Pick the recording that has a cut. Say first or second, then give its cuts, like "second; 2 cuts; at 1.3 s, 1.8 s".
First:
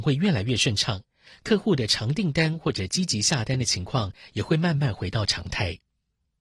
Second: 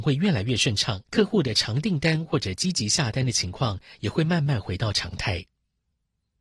second; 1 cut; at 1.1 s